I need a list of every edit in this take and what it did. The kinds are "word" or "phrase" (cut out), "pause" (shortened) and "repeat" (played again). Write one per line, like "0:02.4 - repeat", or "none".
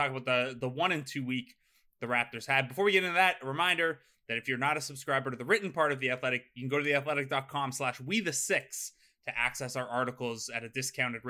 none